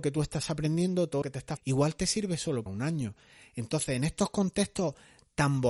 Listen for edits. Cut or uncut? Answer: cut